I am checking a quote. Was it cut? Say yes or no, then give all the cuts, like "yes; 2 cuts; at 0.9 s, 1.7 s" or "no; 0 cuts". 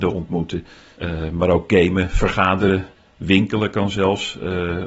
no; 0 cuts